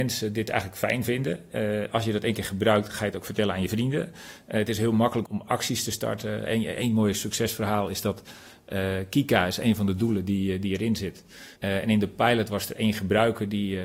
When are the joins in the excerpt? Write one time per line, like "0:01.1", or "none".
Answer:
0:05.3
0:11.6